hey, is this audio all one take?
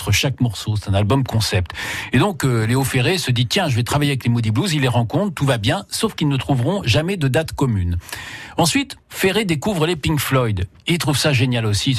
no; 1 cut; at 9.0 s

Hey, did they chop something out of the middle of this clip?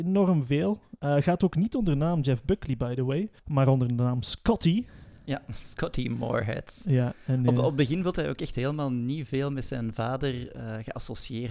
yes; 1 cut; at 3.4 s

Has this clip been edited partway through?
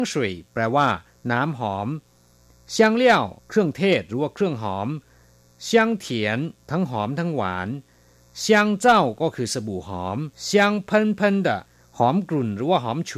yes; 2 cuts; at 3.4 s, 10.3 s

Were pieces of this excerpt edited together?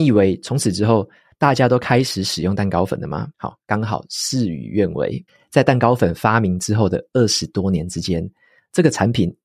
yes; 2 cuts; at 3.3 s, 5.3 s

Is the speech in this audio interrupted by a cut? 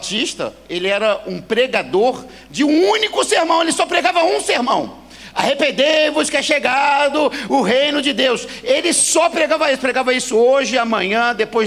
no; 0 cuts

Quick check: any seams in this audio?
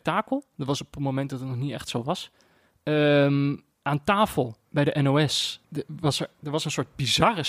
yes; 3 cuts; at 3.7 s, 4.7 s, 5.6 s

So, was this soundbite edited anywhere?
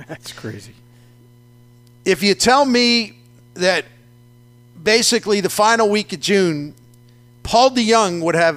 no; 0 cuts

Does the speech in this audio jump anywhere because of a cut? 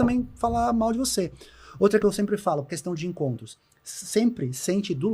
yes; 2 cuts; at 2.0 s, 2.7 s

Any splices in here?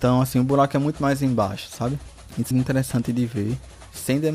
yes; 1 cut; at 2.5 s

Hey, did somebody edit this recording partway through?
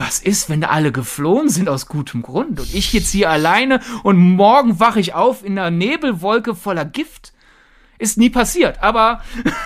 no; 0 cuts

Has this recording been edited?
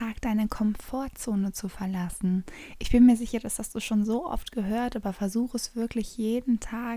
no; 0 cuts

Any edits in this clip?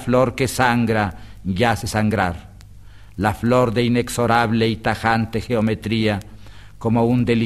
no; 0 cuts

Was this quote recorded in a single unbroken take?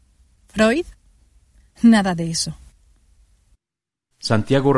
yes; 0 cuts

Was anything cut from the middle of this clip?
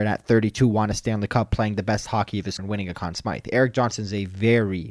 yes; 1 cut; at 2.6 s

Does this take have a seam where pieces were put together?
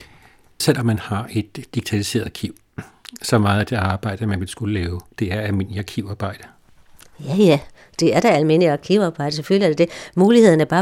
no; 0 cuts

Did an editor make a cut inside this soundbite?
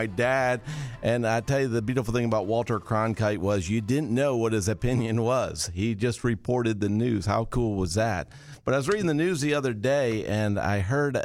no; 0 cuts

